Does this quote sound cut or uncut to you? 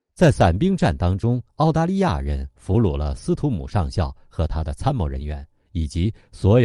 cut